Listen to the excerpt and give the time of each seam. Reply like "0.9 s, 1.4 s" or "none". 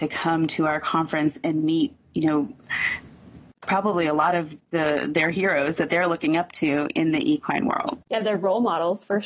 8.0 s